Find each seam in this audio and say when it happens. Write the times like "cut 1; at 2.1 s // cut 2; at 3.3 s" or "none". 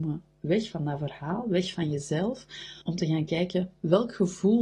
cut 1; at 2.8 s